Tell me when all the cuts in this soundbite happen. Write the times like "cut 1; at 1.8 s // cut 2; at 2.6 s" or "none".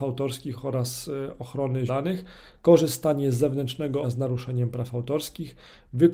cut 1; at 1.9 s // cut 2; at 4.0 s